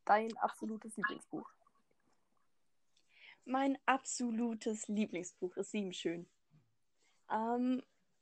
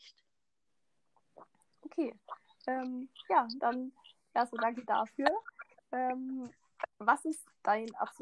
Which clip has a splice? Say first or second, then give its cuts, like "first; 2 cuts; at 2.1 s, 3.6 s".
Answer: second; 1 cut; at 6.9 s